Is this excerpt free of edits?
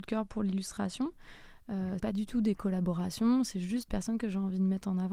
no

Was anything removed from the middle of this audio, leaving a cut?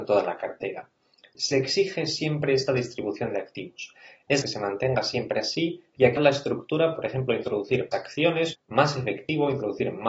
yes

